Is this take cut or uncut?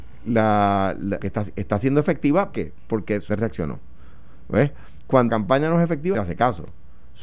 cut